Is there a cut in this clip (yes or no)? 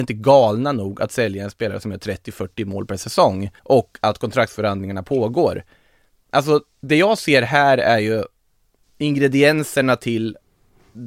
yes